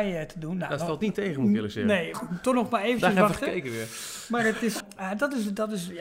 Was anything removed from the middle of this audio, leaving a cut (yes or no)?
yes